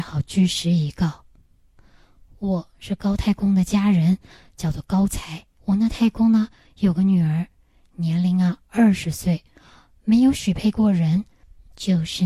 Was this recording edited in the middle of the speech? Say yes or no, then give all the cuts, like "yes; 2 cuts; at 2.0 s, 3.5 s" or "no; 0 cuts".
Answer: yes; 1 cut; at 5.5 s